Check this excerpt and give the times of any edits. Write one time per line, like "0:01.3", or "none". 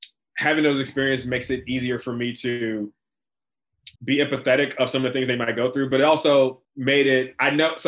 0:04.0
0:06.6